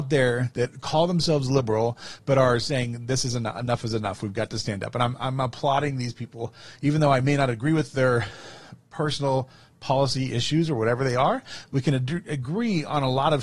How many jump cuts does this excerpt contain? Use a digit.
0